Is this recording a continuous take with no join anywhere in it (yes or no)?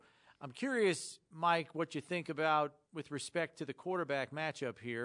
no